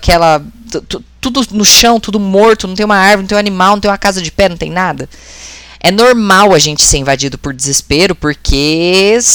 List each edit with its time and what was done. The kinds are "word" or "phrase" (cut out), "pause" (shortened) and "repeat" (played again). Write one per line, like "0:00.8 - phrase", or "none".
none